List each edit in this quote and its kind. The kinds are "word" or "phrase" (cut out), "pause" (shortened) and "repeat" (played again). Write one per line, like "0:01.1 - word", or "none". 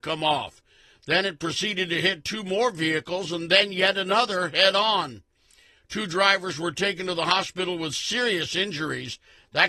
none